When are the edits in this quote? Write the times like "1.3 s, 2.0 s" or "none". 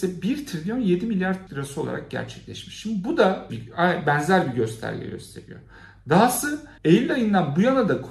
1.5 s, 3.5 s, 6.8 s